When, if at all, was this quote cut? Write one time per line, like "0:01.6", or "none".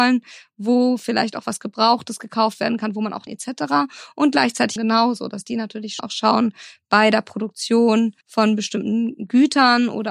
0:03.3
0:04.8
0:06.0
0:08.2